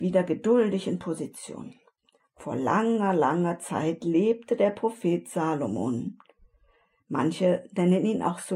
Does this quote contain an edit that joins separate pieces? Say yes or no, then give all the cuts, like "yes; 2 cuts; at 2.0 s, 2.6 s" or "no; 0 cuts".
no; 0 cuts